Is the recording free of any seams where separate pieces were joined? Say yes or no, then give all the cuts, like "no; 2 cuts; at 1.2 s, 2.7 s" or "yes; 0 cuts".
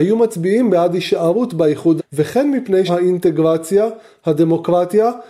no; 2 cuts; at 2.0 s, 2.9 s